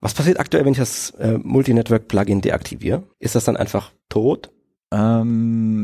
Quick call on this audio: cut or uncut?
cut